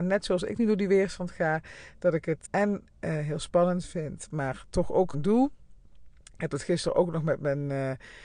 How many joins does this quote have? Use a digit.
2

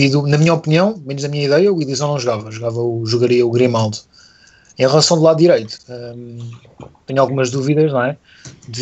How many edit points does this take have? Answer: 0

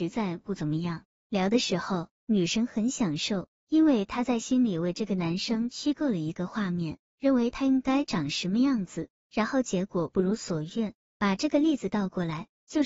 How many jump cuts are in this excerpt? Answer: 1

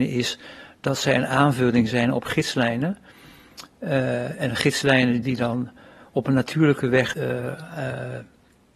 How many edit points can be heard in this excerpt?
2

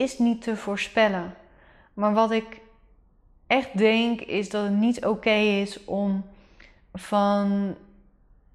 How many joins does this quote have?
0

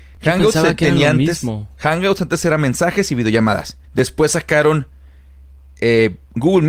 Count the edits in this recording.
2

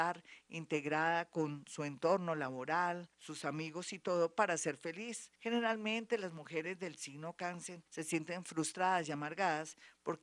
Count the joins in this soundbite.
3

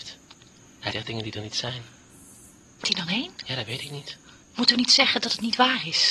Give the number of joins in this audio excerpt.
2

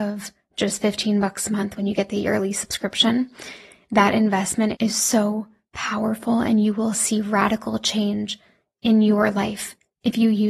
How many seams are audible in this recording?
1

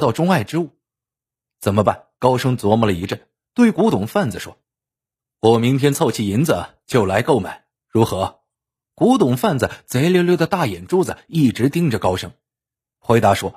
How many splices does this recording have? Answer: 5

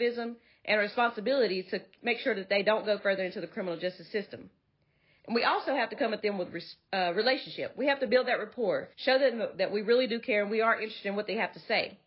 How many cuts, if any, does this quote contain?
1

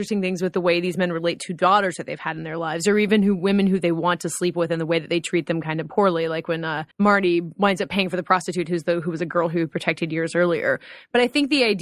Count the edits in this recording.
1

